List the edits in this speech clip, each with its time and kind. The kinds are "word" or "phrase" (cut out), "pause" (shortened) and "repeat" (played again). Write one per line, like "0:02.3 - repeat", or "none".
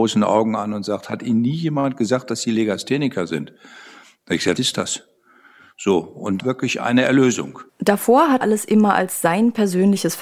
0:04.6 - word
0:06.4 - phrase
0:07.7 - pause
0:08.4 - word